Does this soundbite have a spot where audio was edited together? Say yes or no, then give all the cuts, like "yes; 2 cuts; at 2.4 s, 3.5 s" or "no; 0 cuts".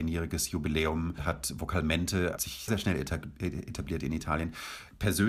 yes; 3 cuts; at 1.2 s, 2.4 s, 2.7 s